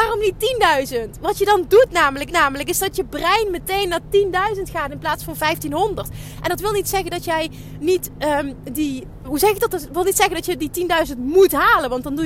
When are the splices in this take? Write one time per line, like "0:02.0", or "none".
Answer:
0:02.3
0:09.2